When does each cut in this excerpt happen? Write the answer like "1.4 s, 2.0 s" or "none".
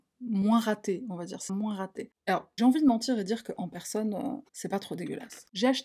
1.5 s, 2.6 s, 4.5 s